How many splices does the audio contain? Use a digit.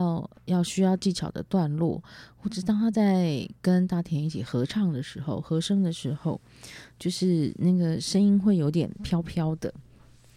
0